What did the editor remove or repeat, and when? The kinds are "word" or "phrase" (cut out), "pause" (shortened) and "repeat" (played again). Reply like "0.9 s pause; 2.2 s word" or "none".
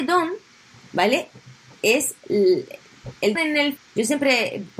3.4 s word; 3.8 s word